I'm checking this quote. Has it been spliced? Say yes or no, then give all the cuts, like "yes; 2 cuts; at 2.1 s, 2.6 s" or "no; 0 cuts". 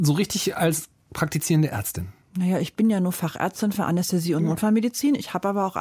no; 0 cuts